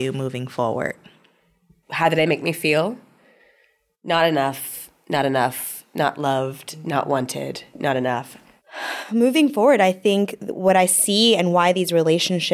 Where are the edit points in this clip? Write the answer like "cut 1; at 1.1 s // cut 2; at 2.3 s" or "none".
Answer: none